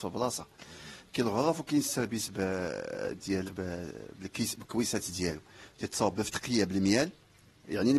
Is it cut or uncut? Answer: cut